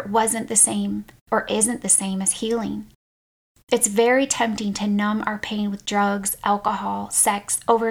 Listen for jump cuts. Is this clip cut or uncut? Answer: uncut